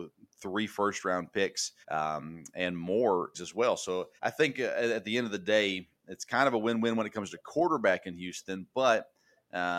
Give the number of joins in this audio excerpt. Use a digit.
3